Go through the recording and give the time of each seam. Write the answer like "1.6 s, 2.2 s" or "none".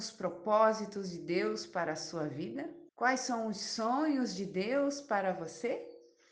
2.9 s